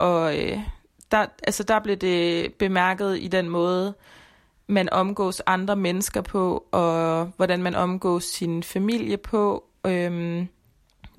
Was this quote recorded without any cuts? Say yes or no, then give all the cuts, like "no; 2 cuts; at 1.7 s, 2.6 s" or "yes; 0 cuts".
yes; 0 cuts